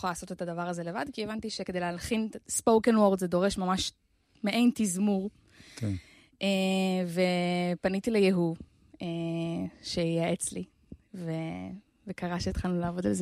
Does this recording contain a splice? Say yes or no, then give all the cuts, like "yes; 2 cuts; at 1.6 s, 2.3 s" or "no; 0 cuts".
no; 0 cuts